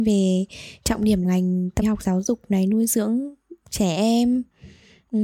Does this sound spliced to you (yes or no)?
yes